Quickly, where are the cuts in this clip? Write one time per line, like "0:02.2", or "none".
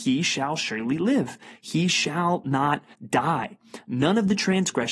0:02.9